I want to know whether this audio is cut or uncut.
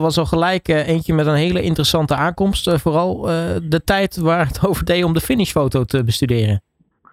uncut